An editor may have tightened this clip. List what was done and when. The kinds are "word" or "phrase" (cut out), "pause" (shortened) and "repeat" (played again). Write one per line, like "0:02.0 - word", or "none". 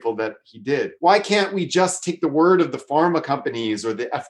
0:01.0 - pause